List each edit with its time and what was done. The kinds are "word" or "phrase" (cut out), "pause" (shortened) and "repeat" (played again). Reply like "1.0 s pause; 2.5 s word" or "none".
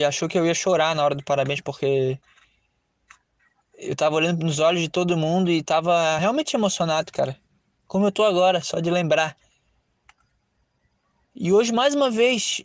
none